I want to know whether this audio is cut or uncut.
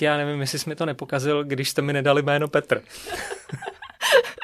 uncut